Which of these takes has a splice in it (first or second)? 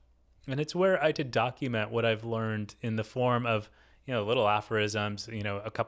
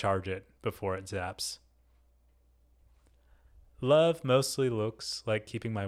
first